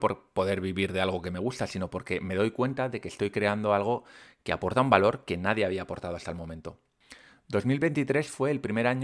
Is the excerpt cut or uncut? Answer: uncut